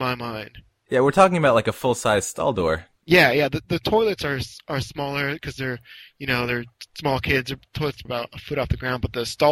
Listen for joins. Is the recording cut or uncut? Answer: cut